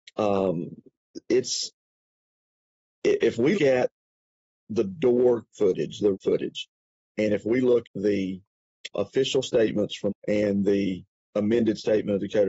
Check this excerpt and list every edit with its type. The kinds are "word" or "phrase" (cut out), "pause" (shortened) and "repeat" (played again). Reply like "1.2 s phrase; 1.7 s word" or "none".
3.5 s word; 5.5 s word; 6.1 s word; 7.8 s word; 8.9 s word; 10.1 s word

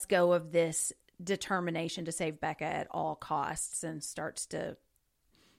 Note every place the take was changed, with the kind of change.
none

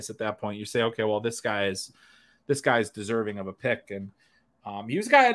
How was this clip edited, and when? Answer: none

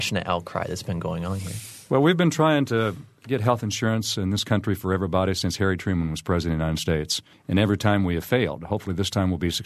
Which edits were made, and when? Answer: 7.3 s pause

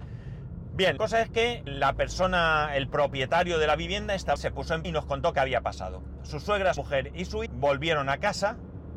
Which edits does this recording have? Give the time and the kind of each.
1.0 s word; 1.7 s word; 4.4 s word; 4.8 s word; 6.8 s word; 7.5 s word

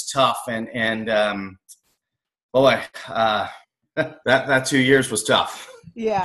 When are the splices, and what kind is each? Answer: 3.6 s pause; 4.2 s pause

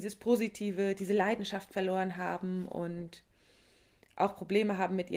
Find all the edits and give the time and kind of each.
none

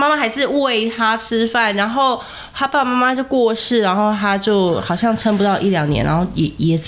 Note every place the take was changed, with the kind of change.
none

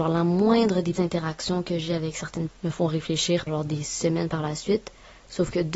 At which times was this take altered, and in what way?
0.9 s word; 2.5 s word; 3.5 s word

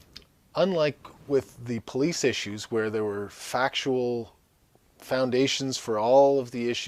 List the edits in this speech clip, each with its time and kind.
none

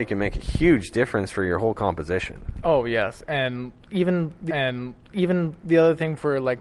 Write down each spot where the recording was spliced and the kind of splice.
4.5 s repeat

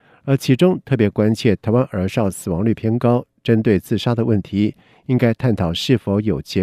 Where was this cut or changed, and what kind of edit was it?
none

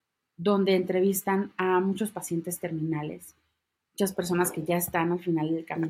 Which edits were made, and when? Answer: none

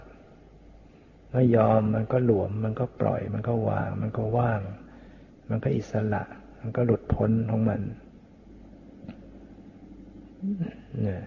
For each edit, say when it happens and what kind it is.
none

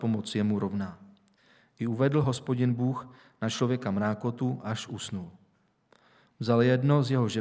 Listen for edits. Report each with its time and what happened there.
none

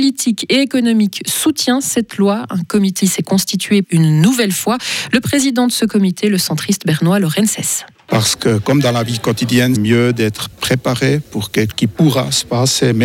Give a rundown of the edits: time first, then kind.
3.0 s word; 3.8 s phrase; 9.7 s word; 10.5 s word; 11.7 s word

